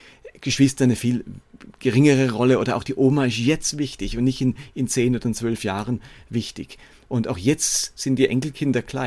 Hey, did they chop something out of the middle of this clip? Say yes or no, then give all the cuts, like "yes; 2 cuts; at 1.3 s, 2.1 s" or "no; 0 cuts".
no; 0 cuts